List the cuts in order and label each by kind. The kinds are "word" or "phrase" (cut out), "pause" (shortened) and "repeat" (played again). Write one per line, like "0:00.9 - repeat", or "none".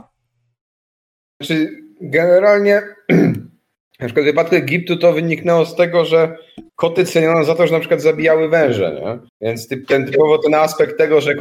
0:06.7 - pause
0:09.3 - pause